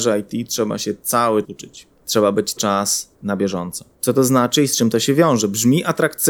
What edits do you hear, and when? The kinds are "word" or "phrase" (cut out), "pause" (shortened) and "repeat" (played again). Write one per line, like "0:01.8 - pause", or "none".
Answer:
0:01.4 - word
0:02.6 - word
0:03.1 - pause
0:03.9 - pause